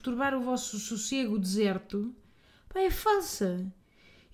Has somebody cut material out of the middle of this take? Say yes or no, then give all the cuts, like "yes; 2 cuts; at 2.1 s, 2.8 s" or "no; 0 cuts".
no; 0 cuts